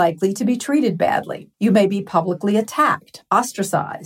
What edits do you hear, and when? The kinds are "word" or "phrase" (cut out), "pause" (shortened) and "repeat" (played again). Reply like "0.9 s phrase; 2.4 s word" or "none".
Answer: 1.5 s pause